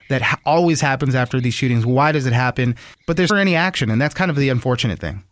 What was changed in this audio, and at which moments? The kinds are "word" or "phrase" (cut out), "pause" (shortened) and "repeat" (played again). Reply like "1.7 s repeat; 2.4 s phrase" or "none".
2.9 s pause; 3.3 s word